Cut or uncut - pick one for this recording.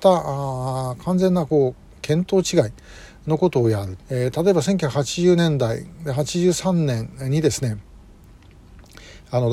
cut